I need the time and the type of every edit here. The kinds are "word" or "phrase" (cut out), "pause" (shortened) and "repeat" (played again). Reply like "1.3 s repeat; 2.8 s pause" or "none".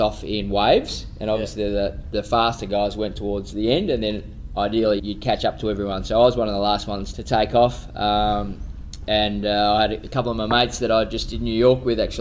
5.0 s word; 7.1 s word

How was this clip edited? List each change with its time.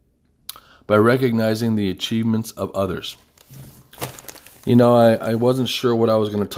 none

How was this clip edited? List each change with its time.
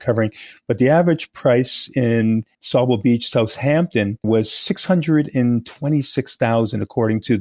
2.5 s pause; 4.2 s word

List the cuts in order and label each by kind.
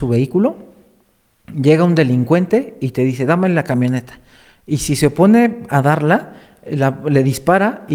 none

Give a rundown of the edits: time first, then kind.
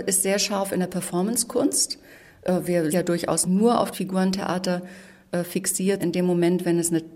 2.9 s word; 3.4 s word; 3.9 s word; 6.0 s word

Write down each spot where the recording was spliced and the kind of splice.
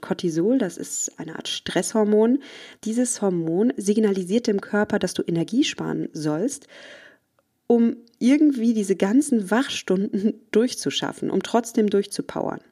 2.8 s pause

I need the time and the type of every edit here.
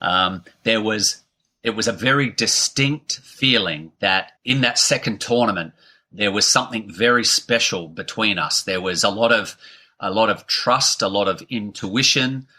4.4 s pause

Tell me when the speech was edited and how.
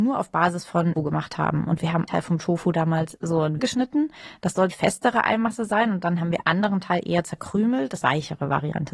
1.0 s word; 2.1 s word; 3.2 s pause; 3.6 s word; 4.7 s phrase; 6.4 s word; 8.0 s phrase

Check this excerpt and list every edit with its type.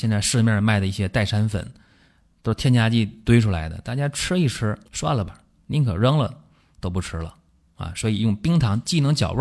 4.8 s pause

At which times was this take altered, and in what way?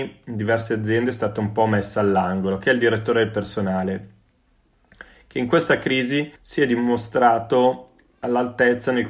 6.4 s pause

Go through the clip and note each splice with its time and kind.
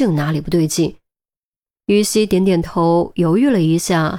none

